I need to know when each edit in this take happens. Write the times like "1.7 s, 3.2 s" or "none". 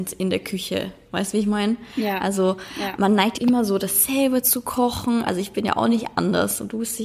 3.4 s